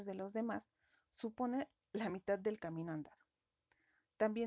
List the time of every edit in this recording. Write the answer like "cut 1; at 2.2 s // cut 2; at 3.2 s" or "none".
none